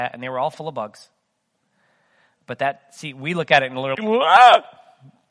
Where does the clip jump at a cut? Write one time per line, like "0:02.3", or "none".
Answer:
0:03.9